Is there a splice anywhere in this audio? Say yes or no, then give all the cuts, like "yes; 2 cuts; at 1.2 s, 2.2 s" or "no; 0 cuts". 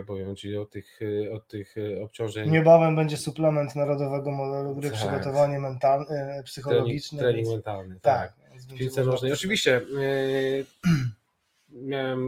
yes; 1 cut; at 10.7 s